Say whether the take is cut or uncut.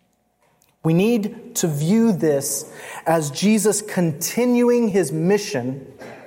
uncut